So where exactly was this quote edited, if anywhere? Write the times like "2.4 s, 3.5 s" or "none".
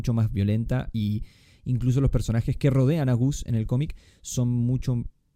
none